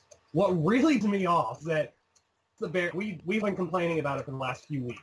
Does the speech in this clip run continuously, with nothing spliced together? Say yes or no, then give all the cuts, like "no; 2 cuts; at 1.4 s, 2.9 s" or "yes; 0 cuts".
no; 5 cuts; at 1.0 s, 1.6 s, 2.6 s, 2.9 s, 3.4 s